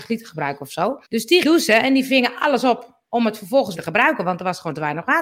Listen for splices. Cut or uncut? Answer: cut